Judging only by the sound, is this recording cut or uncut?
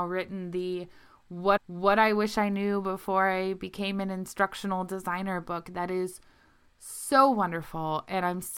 cut